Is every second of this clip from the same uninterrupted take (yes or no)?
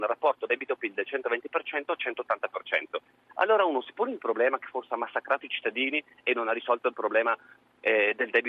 yes